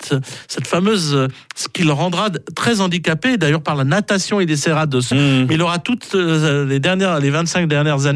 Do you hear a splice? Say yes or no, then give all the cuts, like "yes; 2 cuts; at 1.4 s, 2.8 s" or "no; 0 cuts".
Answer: yes; 1 cut; at 5.1 s